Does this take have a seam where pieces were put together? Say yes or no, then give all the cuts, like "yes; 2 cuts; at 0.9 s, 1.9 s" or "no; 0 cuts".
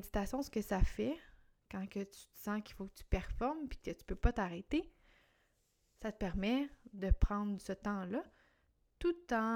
no; 0 cuts